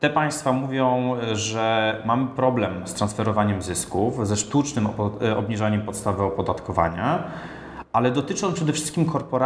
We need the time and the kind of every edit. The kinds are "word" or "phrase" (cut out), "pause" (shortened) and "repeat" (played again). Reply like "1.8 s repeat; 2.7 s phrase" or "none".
none